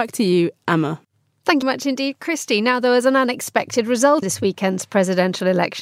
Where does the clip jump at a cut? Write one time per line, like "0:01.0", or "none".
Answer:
0:01.6
0:04.2